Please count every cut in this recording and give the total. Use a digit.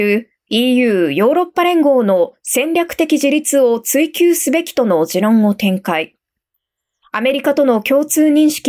0